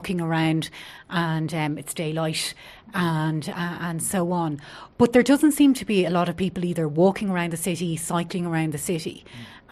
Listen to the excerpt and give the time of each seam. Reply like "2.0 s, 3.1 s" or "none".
none